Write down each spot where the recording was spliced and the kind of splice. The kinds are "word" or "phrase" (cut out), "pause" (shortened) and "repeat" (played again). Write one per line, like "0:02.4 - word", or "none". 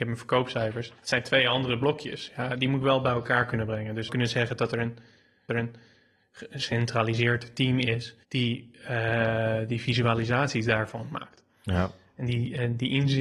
0:01.0 - pause
0:04.1 - phrase
0:05.5 - repeat
0:08.2 - pause

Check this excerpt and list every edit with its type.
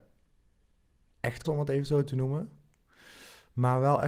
0:01.4 - word

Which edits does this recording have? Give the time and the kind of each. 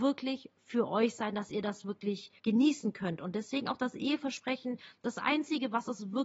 0:02.4 - pause

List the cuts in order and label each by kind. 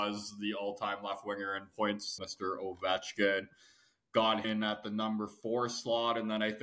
0:02.2 - word
0:04.4 - word

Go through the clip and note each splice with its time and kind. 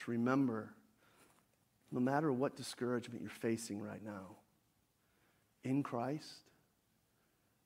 none

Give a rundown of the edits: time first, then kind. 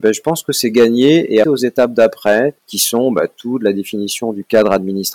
0:01.4 - phrase
0:02.6 - pause

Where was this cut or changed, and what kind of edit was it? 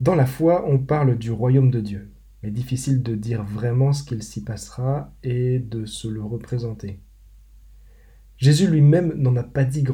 none

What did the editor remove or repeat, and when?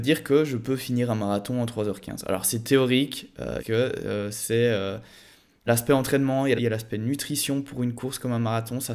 0:03.6 - phrase
0:05.7 - phrase
0:06.6 - word

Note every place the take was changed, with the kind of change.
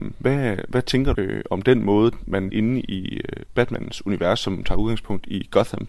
0:01.1 - word
0:02.5 - phrase

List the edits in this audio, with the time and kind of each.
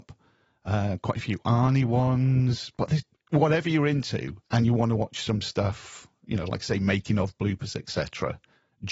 0:03.1 - pause
0:04.4 - pause

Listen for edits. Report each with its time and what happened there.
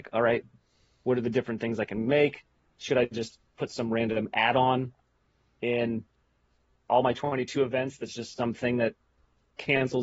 none

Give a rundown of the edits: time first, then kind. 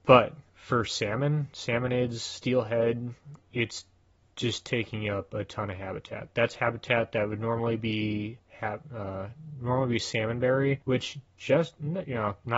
0:03.4 - pause
0:10.8 - pause

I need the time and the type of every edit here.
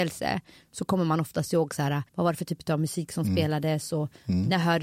0:02.1 - pause

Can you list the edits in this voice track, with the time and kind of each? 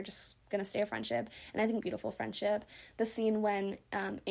0:01.8 - phrase

